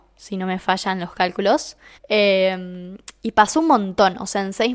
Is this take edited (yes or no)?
yes